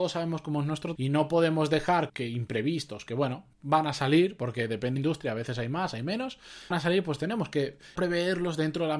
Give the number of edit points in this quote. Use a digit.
6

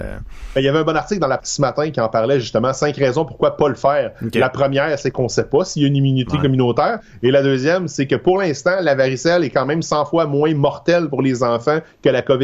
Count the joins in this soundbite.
1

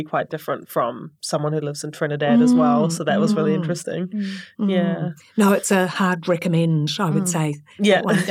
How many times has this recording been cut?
1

